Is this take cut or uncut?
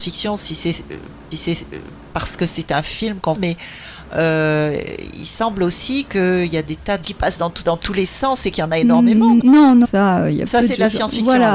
cut